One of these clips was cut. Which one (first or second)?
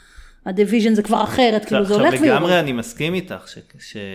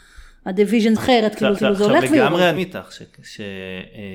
second